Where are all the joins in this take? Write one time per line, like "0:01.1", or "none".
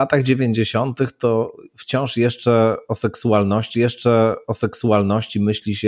0:03.7